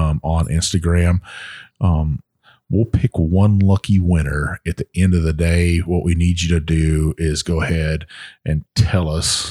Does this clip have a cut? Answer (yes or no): no